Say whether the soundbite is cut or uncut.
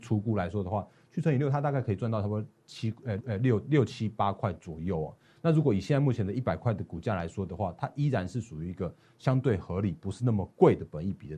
cut